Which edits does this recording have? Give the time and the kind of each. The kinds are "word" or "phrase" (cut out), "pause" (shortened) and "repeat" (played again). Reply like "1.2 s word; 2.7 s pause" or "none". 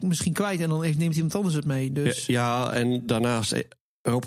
none